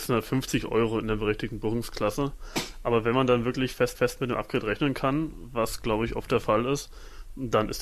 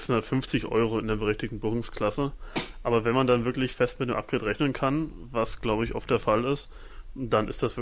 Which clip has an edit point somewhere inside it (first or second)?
first